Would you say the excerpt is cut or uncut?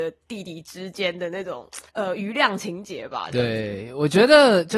cut